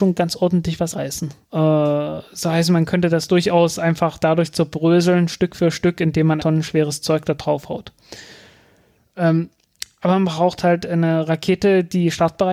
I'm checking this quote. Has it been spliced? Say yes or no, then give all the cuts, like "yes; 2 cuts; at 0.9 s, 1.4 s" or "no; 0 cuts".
yes; 3 cuts; at 0.9 s, 1.4 s, 6.4 s